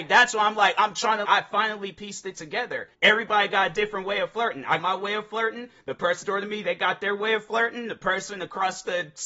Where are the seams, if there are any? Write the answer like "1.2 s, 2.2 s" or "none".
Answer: 1.2 s, 2.9 s, 4.8 s, 6.2 s

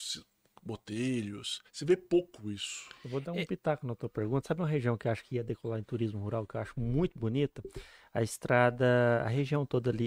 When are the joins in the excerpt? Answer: 1.7 s

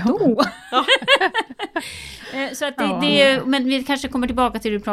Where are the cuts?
none

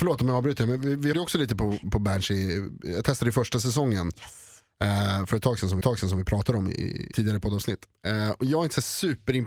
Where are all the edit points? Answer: 1.1 s, 1.8 s, 5.8 s, 7.1 s

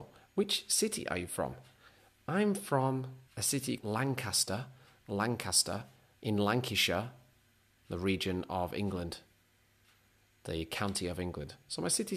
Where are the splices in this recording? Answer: 3.3 s, 3.8 s

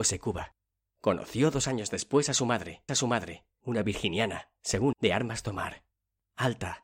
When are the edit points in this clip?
2.9 s, 4.9 s

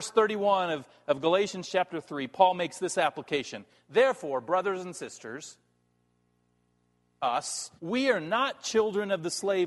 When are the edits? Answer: 7.8 s

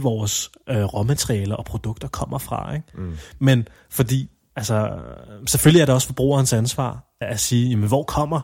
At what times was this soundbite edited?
7.2 s

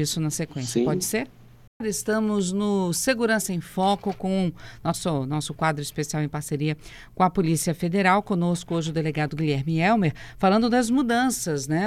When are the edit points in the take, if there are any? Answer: none

